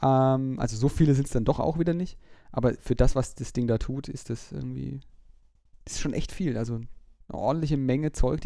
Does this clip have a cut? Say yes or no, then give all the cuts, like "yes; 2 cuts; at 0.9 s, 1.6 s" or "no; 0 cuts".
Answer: no; 0 cuts